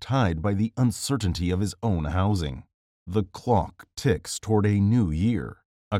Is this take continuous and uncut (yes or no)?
yes